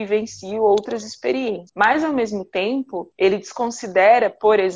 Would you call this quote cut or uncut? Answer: cut